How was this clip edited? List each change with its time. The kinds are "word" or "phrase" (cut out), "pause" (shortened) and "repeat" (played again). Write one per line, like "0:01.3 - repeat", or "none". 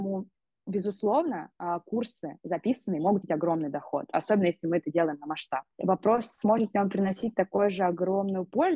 0:03.2 - word
0:05.7 - pause